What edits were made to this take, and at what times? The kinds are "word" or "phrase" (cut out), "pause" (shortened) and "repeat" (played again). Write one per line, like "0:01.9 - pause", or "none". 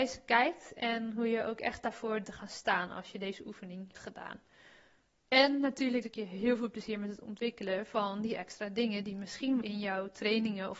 0:02.2 - word
0:03.9 - word
0:06.0 - word
0:09.6 - word